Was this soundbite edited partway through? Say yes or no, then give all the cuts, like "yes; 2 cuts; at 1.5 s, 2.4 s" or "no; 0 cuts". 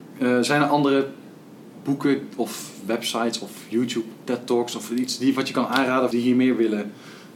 yes; 1 cut; at 6.1 s